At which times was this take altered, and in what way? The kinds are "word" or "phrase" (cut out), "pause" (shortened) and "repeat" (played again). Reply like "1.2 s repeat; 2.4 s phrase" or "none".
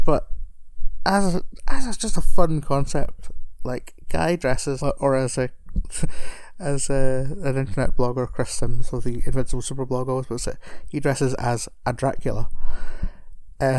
4.8 s phrase